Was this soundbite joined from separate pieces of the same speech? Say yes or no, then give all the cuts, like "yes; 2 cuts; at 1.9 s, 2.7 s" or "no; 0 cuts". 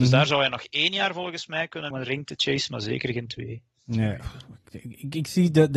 yes; 1 cut; at 1.9 s